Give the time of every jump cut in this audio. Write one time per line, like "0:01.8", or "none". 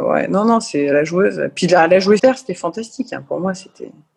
0:02.2